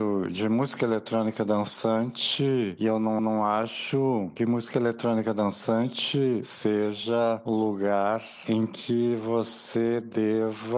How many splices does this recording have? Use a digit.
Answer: 1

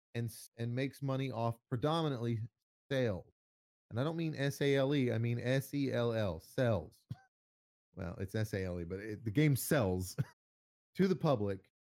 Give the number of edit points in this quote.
1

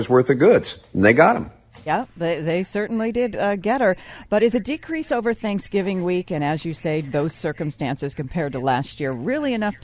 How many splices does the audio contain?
0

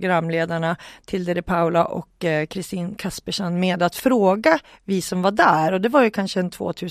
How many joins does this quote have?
0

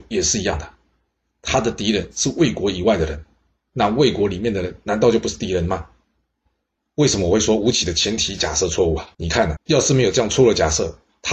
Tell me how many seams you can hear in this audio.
2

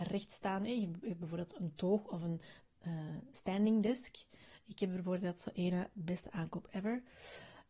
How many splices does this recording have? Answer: 0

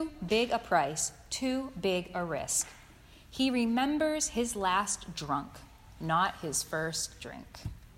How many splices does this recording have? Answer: 0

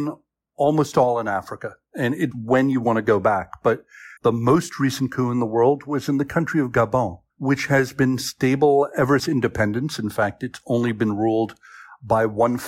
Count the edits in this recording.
4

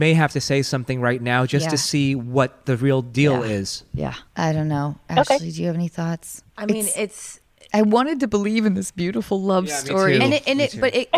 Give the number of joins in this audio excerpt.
2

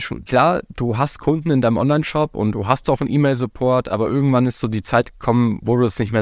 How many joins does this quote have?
0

